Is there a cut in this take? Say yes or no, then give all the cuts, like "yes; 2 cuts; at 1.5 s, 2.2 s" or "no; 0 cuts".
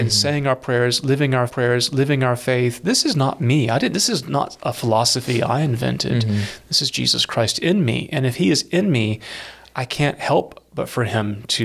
yes; 1 cut; at 1.5 s